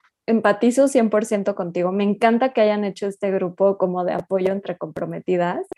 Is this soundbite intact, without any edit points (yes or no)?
yes